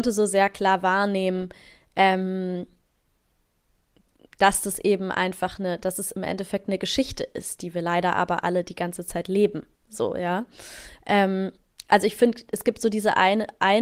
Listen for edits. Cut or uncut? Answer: uncut